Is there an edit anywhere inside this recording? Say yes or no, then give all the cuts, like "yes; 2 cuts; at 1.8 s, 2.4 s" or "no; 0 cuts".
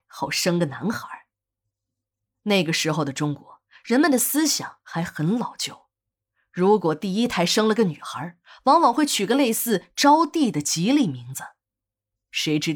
no; 0 cuts